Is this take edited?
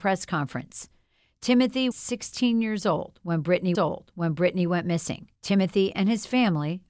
yes; 3 cuts; at 1.9 s, 3.7 s, 5.3 s

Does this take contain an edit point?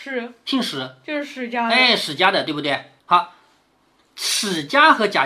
yes; 1 cut; at 3.0 s

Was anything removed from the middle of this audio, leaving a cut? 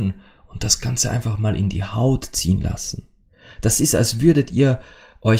no; 0 cuts

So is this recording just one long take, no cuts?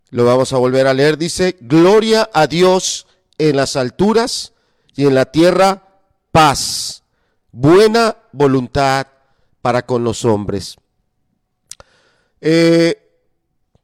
yes; 0 cuts

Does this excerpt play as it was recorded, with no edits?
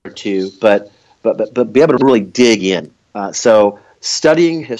yes; 0 cuts

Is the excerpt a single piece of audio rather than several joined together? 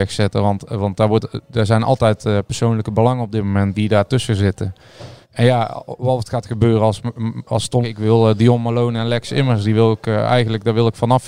no; 3 cuts; at 3.7 s, 5.2 s, 7.8 s

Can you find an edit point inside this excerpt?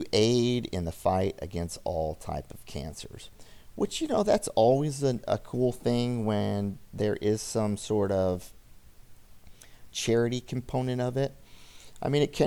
no; 0 cuts

